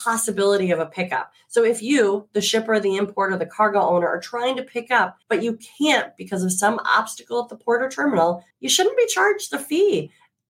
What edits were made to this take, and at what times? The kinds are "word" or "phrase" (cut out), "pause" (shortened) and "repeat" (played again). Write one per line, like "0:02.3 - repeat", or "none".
0:05.2 - pause
0:08.5 - pause